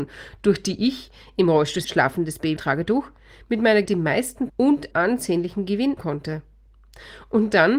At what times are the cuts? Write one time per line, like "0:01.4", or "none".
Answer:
0:01.8
0:02.6
0:03.9
0:04.5
0:04.9
0:06.0